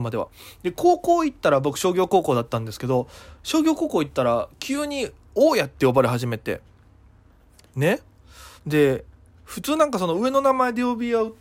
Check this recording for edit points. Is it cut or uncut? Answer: cut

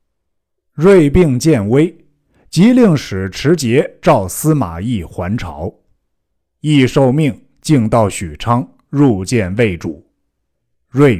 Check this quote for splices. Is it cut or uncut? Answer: uncut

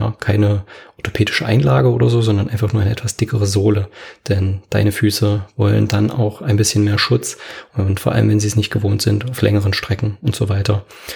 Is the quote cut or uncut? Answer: uncut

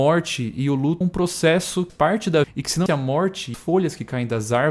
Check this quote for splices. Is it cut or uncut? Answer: cut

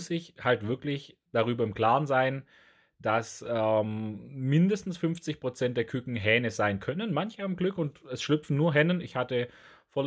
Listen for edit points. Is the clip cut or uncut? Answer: uncut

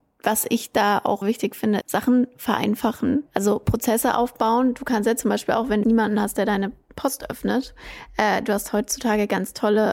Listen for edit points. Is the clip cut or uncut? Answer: cut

